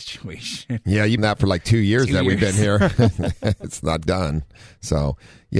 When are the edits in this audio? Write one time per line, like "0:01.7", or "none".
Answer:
0:01.2
0:04.1